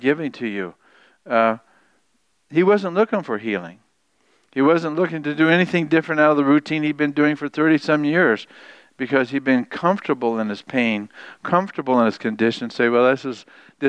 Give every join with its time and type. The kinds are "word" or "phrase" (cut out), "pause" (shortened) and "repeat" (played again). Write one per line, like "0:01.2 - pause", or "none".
none